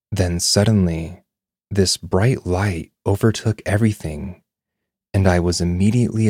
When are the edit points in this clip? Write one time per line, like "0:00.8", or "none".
none